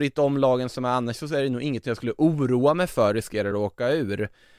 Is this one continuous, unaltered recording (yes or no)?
yes